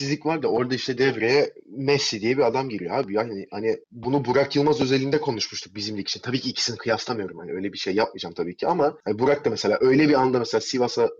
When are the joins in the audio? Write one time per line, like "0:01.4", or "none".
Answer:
0:03.8